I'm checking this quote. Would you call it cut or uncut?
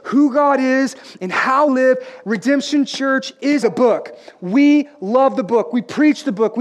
cut